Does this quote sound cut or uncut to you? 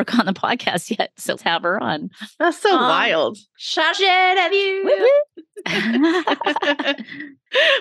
cut